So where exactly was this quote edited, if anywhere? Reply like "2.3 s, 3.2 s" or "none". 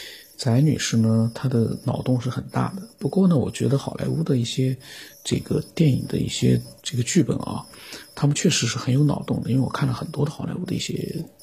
5.1 s, 6.8 s